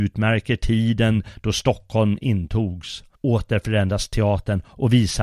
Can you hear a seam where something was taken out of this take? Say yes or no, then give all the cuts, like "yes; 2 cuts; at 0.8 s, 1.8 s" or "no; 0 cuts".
yes; 1 cut; at 3.1 s